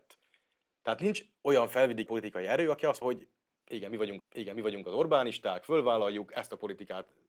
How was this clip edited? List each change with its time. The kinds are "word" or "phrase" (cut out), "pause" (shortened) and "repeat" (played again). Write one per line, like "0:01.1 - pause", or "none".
0:02.1 - word
0:03.0 - word
0:04.2 - repeat